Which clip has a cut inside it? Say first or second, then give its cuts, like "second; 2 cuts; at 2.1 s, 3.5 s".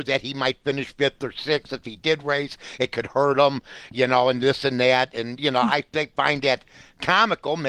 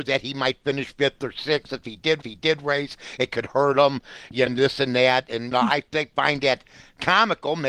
second; 3 cuts; at 2.2 s, 4.5 s, 5.5 s